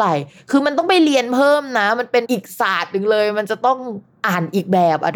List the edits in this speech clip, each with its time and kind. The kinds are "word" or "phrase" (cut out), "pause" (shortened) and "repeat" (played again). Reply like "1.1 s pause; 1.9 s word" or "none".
none

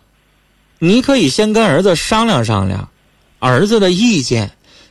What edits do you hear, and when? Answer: 3.4 s word

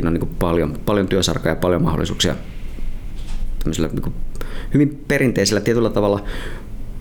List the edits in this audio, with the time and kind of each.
none

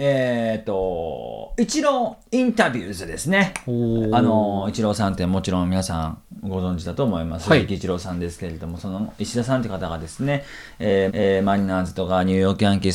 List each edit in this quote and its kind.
11.1 s repeat

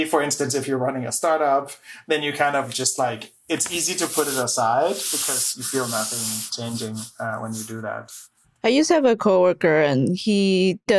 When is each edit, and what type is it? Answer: none

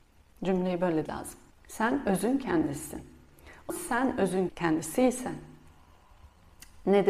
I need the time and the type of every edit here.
1.1 s word; 1.5 s pause; 3.7 s word; 4.5 s word

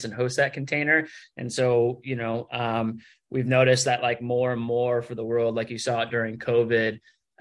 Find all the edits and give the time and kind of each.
none

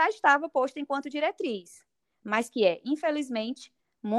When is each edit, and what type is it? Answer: none

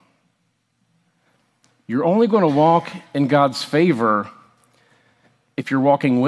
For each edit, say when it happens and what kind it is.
none

